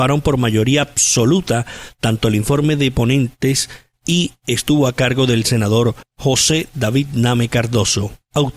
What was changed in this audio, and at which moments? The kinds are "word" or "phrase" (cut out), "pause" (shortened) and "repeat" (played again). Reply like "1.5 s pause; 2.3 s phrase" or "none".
none